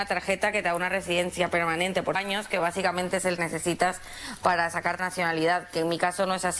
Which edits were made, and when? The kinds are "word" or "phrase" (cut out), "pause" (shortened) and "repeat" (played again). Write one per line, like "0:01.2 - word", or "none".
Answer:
0:02.1 - word
0:03.4 - phrase
0:05.0 - word